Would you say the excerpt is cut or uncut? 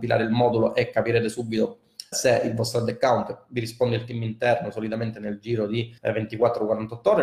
cut